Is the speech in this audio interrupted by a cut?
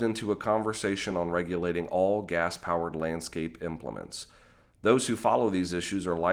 no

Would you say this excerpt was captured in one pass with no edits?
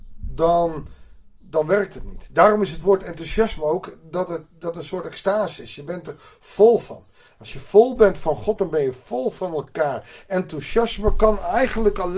yes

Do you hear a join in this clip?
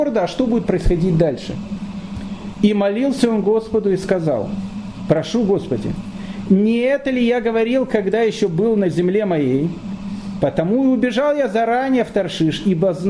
no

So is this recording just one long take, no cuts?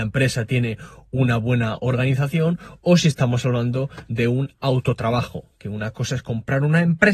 yes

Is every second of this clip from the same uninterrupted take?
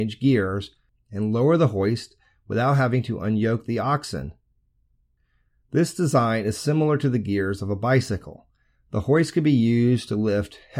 yes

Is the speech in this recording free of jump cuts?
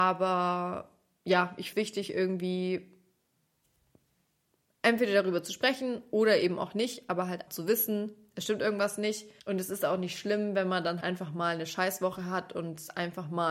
no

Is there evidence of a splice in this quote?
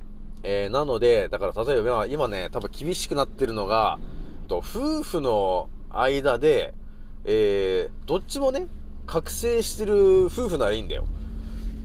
yes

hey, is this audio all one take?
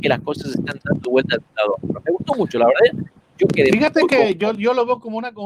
yes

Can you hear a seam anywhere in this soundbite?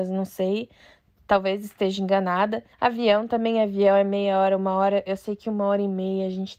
yes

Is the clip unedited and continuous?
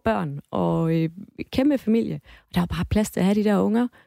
yes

